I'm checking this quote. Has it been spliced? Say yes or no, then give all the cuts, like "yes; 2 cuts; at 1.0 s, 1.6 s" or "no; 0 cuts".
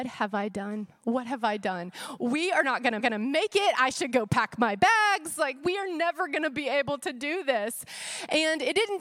yes; 1 cut; at 3.0 s